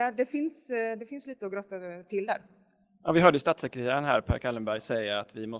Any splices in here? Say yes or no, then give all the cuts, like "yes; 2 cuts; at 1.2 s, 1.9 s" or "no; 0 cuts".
no; 0 cuts